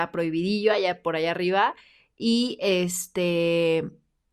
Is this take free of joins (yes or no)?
yes